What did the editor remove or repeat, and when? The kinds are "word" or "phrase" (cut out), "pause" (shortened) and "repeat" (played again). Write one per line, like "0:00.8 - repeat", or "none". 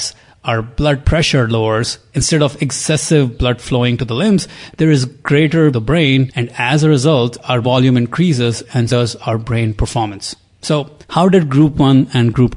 0:05.7 - phrase
0:07.6 - word
0:08.9 - word
0:11.0 - pause